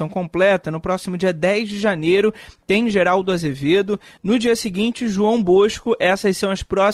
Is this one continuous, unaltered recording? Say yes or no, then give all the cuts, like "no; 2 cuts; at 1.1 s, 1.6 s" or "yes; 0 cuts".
yes; 0 cuts